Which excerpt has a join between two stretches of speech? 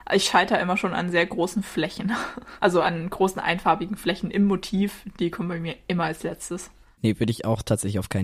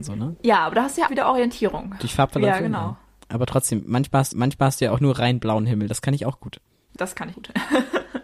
second; 4 cuts; at 1.1 s, 4.3 s, 7.0 s, 7.3 s

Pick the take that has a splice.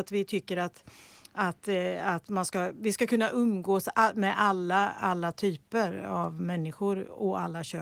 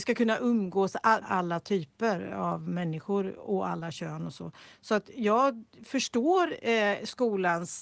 second; 1 cut; at 1.2 s

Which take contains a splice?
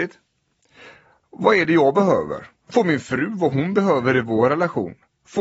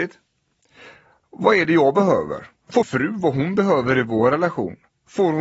second; 1 cut; at 2.8 s

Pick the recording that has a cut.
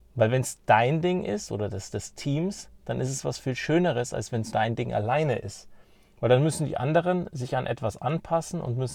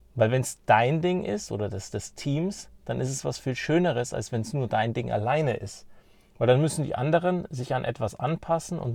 first; 1 cut; at 4.5 s

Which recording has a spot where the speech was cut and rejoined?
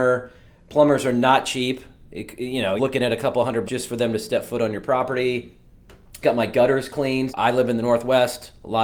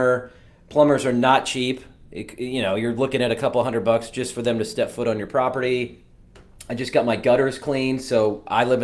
first; 4 cuts; at 2.8 s, 3.6 s, 6.2 s, 7.3 s

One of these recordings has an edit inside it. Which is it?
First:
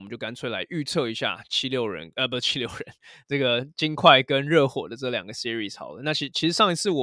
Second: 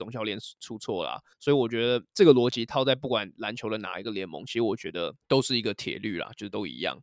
second; 1 cut; at 1.3 s

